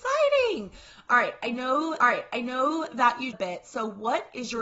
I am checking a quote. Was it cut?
yes; 2 cuts; at 2.0 s, 3.3 s

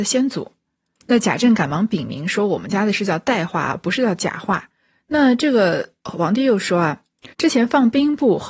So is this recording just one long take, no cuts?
no; 2 cuts; at 4.7 s, 7.3 s

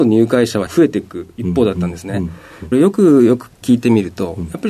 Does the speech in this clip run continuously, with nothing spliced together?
no; 1 cut; at 2.7 s

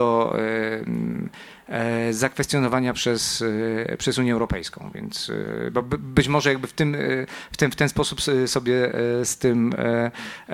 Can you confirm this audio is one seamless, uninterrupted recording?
yes; 0 cuts

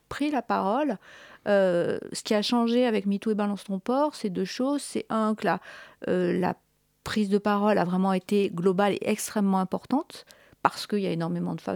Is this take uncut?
yes; 0 cuts

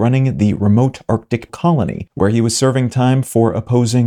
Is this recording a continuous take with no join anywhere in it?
no; 1 cut; at 1.5 s

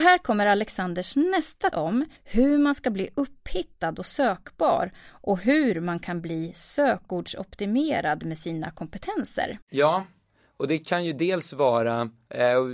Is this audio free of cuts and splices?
no; 3 cuts; at 1.7 s, 2.2 s, 9.6 s

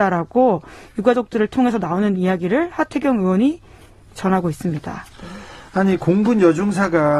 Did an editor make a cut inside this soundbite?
no; 0 cuts

